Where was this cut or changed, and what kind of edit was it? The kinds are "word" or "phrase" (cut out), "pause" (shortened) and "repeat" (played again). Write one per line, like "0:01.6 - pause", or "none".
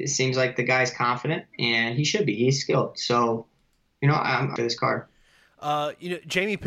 0:04.6 - word